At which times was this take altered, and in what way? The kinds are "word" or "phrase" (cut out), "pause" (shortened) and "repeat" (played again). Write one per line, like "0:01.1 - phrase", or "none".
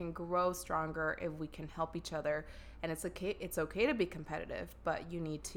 none

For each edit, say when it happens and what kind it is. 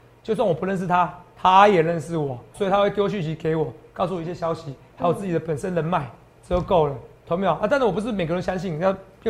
0:02.5 - word

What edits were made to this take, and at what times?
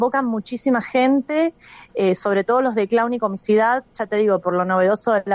none

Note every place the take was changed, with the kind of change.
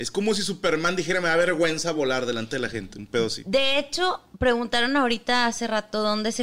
none

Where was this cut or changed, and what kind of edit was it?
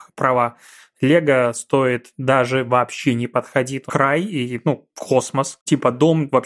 0:03.9 - phrase

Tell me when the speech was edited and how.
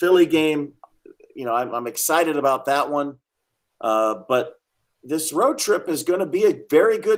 none

